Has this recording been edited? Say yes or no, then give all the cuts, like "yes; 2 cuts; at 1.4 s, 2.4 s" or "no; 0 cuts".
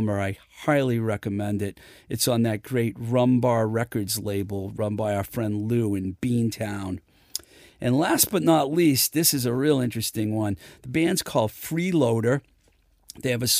no; 0 cuts